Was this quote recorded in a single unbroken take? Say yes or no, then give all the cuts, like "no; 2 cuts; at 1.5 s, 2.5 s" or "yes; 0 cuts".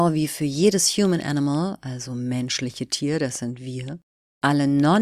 yes; 0 cuts